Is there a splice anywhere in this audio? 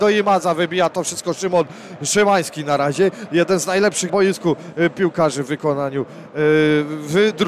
yes; 1 cut; at 4.1 s

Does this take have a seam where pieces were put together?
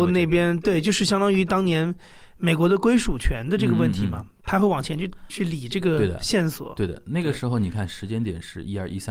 no; 0 cuts

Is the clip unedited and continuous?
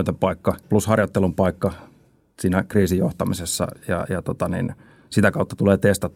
yes; 0 cuts

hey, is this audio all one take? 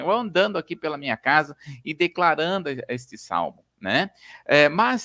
yes; 0 cuts

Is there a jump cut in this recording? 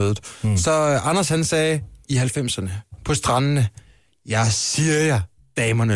no; 0 cuts

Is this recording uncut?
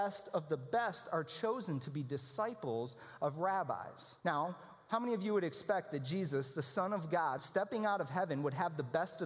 no; 2 cuts; at 4.2 s, 7.4 s

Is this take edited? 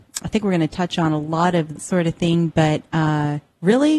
yes; 1 cut; at 1.8 s

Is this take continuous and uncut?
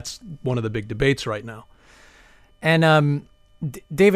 yes; 0 cuts

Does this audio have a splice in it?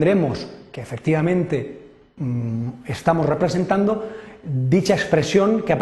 no; 0 cuts

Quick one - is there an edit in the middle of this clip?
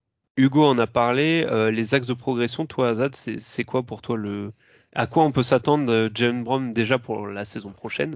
no; 0 cuts

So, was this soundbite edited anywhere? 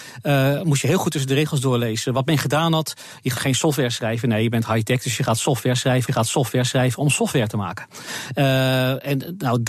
yes; 2 cuts; at 3.3 s, 6.1 s

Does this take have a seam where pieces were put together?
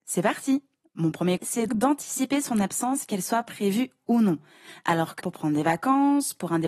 yes; 3 cuts; at 1.4 s, 1.7 s, 5.2 s

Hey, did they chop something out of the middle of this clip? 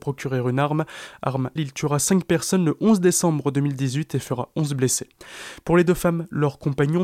yes; 1 cut; at 1.6 s

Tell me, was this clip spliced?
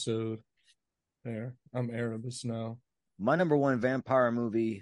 no; 0 cuts

